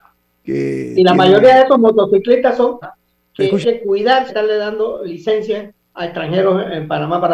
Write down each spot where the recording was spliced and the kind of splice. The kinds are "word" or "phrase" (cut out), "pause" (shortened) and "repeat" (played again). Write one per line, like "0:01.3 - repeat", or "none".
0:02.8 - word
0:03.6 - phrase
0:04.3 - word